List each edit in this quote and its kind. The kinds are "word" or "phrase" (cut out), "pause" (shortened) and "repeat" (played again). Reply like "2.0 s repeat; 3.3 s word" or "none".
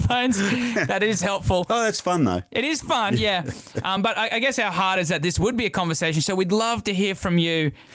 none